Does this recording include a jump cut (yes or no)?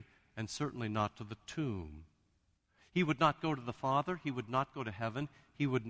no